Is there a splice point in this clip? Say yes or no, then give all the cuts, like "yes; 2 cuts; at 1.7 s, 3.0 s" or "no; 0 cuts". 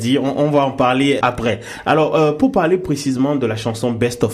yes; 1 cut; at 1.2 s